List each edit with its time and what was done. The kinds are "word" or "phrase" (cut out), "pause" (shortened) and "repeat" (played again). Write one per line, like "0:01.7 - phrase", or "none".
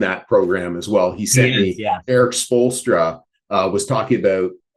none

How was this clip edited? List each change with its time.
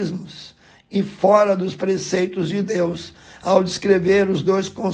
none

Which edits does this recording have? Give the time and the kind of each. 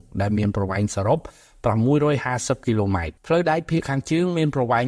0:03.2 - pause

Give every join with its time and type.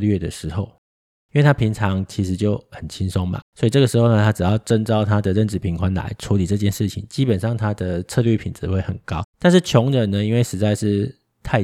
0:03.5 - pause
0:09.3 - pause

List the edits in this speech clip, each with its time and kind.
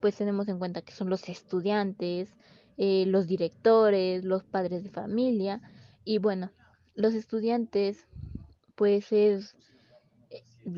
none

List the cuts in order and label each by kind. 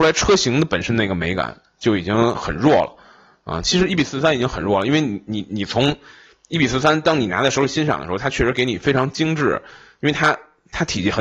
none

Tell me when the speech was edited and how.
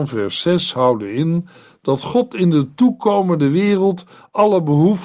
none

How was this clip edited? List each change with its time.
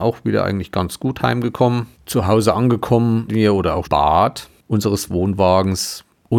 0:01.9 - pause
0:03.3 - word
0:03.8 - phrase

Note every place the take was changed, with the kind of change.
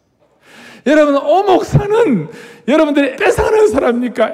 0:03.1 - word

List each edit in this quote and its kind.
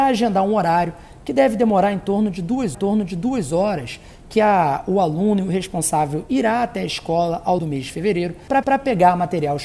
0:02.7 - repeat
0:07.6 - word
0:08.6 - repeat

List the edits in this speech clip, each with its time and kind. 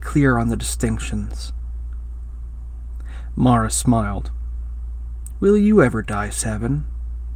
none

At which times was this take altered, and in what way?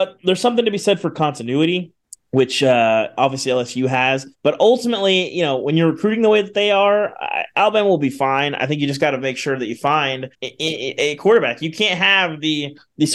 0:02.0 - pause
0:04.3 - pause
0:10.3 - pause

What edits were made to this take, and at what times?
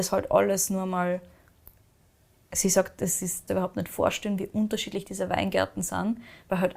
0:03.5 - phrase

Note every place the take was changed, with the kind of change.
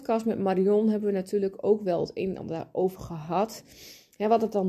none

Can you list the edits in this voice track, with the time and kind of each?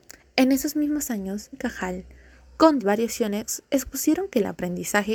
0:01.5 - word
0:02.8 - word

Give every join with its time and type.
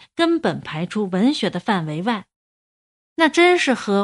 none

